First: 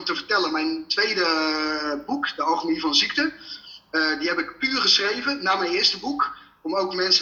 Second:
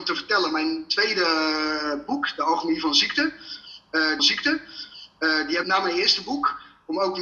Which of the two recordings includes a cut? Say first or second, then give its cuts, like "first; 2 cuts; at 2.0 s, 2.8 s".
second; 2 cuts; at 4.2 s, 5.6 s